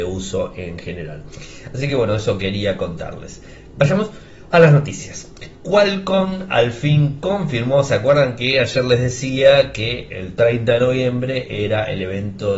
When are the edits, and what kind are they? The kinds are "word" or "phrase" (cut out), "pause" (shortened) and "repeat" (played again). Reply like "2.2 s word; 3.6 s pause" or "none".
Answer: none